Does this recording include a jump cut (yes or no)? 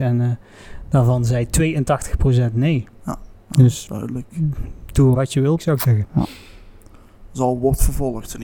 yes